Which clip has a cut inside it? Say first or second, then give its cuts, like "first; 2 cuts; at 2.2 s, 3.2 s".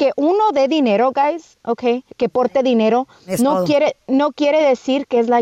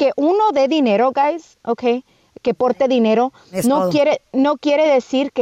first; 1 cut; at 2.1 s